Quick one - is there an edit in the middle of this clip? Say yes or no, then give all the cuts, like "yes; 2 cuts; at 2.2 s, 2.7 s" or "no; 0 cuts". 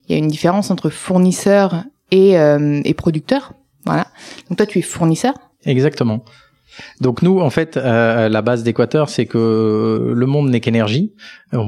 no; 0 cuts